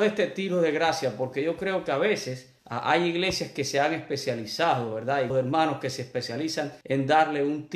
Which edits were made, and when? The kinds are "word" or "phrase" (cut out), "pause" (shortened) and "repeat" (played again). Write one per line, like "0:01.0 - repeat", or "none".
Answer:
0:02.6 - pause
0:05.3 - word
0:06.8 - pause